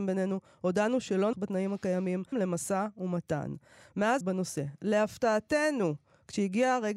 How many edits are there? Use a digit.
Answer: 3